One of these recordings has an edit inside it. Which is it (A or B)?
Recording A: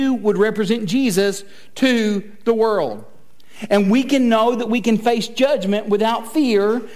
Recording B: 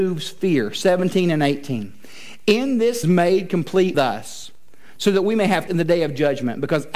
B